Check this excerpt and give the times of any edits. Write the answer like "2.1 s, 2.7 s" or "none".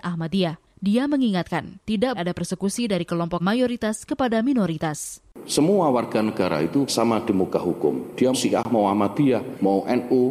2.1 s, 3.4 s, 6.9 s, 8.3 s

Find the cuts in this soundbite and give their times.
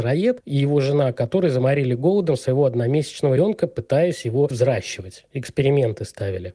3.4 s, 4.5 s

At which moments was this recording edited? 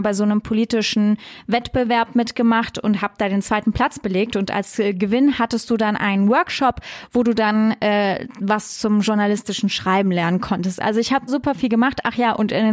11.3 s

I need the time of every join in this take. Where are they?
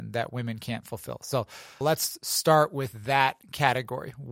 1.8 s

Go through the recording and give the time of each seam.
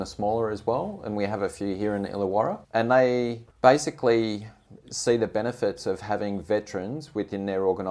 2.6 s, 3.5 s

